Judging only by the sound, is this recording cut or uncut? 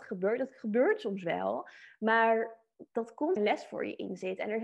cut